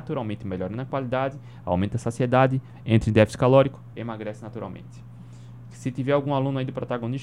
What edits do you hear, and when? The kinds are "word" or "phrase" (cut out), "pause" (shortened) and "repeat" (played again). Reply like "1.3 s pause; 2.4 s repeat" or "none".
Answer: none